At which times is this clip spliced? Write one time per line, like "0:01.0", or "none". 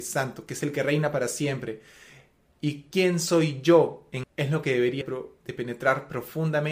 0:04.2
0:05.0